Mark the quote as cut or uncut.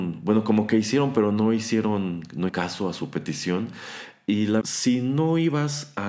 cut